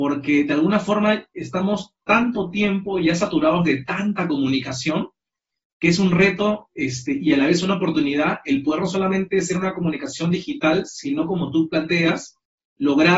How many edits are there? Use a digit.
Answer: 0